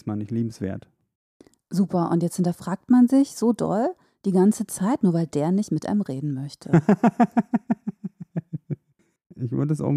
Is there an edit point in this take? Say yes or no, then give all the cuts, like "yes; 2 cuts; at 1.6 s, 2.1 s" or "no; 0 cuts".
no; 0 cuts